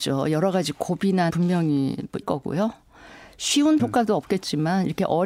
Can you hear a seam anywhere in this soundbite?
yes; 3 cuts; at 1.3 s, 2.2 s, 3.8 s

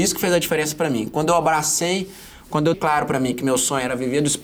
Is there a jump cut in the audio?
yes; 1 cut; at 2.7 s

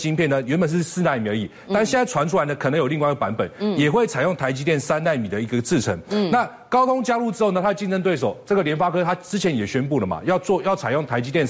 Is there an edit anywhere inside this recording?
no; 0 cuts

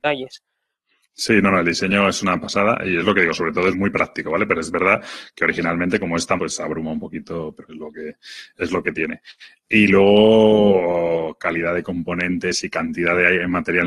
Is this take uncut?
no; 3 cuts; at 3.7 s, 6.4 s, 7.6 s

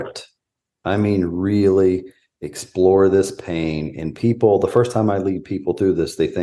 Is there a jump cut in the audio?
no; 0 cuts

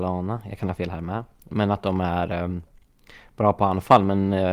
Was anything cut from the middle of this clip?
no; 0 cuts

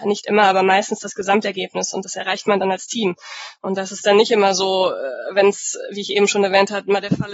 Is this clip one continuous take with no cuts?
yes; 0 cuts

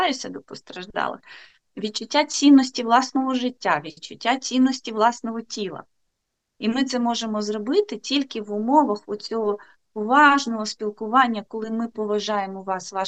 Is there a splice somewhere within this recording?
no; 0 cuts

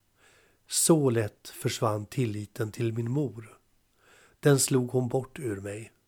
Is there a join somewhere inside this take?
no; 0 cuts

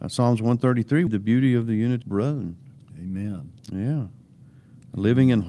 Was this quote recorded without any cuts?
no; 3 cuts; at 1.1 s, 2.0 s, 3.6 s

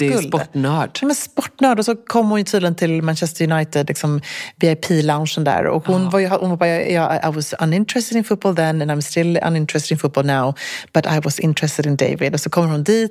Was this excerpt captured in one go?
yes; 0 cuts

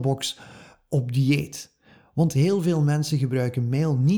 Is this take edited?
no; 0 cuts

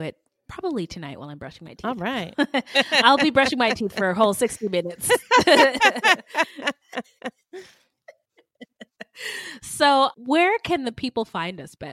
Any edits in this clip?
yes; 1 cut; at 10.1 s

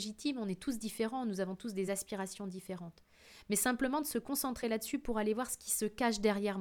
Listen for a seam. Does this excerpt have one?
no; 0 cuts

